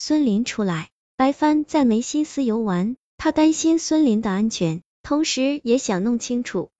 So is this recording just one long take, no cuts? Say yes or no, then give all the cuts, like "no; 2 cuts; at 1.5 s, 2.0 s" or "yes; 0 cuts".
yes; 0 cuts